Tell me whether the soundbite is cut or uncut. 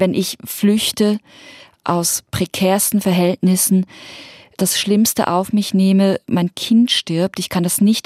uncut